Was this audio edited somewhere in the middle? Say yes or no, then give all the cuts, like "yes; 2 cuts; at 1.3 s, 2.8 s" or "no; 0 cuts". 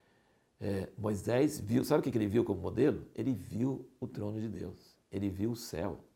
no; 0 cuts